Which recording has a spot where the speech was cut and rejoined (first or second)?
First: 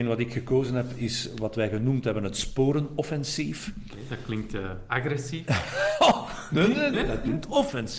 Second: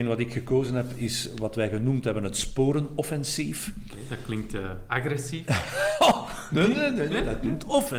first